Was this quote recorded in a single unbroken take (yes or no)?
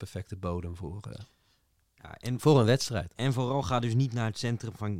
yes